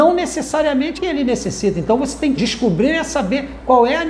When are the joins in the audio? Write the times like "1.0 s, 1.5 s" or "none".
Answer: 1.0 s, 2.4 s